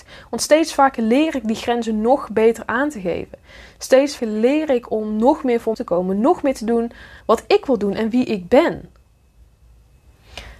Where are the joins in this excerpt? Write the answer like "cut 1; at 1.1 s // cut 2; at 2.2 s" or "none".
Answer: cut 1; at 4.2 s // cut 2; at 5.7 s // cut 3; at 7.2 s

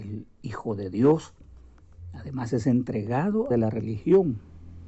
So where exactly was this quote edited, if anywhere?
cut 1; at 3.5 s

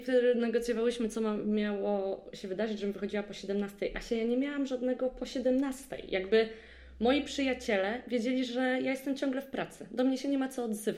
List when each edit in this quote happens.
none

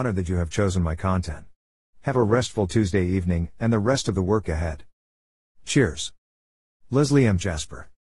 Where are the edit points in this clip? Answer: cut 1; at 4.4 s

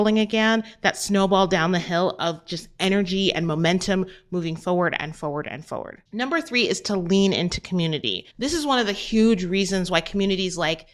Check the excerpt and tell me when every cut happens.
cut 1; at 6.1 s // cut 2; at 8.3 s

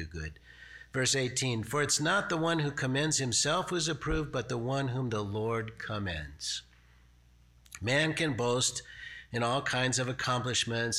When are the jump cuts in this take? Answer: none

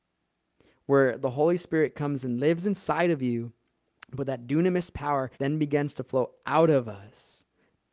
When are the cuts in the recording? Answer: cut 1; at 5.3 s

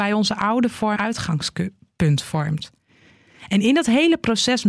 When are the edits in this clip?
cut 1; at 1.0 s

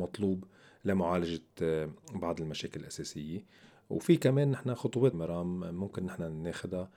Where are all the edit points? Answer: cut 1; at 5.1 s

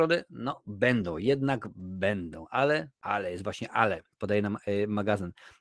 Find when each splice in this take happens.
cut 1; at 3.0 s

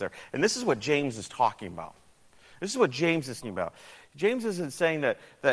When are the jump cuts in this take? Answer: cut 1; at 3.4 s

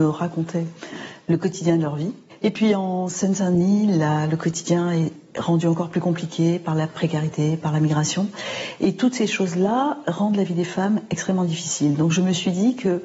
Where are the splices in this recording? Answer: none

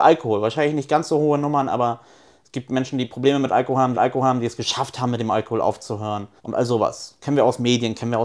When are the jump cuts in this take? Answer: cut 1; at 3.9 s // cut 2; at 6.4 s

